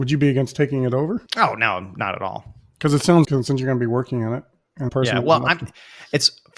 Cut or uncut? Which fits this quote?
cut